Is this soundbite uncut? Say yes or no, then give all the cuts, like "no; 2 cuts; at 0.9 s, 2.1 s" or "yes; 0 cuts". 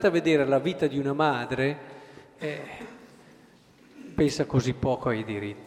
yes; 0 cuts